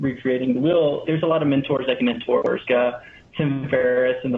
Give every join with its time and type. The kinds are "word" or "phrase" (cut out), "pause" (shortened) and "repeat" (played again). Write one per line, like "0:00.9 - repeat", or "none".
0:01.1 - word
0:02.0 - phrase
0:02.6 - word